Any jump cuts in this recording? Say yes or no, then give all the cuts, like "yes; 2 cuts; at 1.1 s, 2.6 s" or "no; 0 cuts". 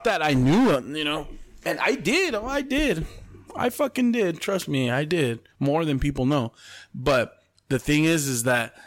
no; 0 cuts